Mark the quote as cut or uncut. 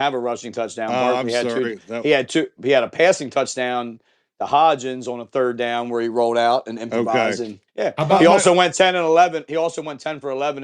cut